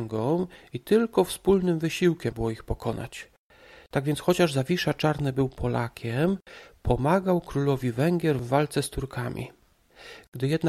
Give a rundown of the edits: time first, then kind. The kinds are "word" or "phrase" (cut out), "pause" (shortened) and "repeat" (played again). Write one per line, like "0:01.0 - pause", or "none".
0:02.3 - word